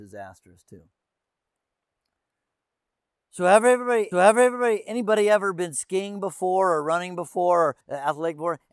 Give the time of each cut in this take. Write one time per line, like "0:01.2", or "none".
0:04.1
0:07.8